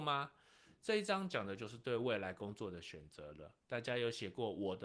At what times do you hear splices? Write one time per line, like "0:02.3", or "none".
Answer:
0:03.6